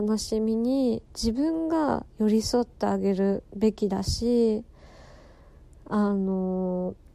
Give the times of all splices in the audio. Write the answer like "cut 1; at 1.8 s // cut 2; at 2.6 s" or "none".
cut 1; at 1.1 s // cut 2; at 3.5 s